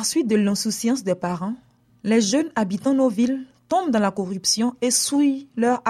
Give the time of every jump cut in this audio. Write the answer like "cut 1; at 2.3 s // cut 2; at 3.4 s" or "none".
none